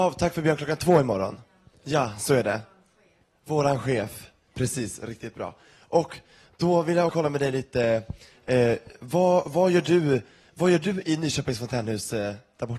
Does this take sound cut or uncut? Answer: cut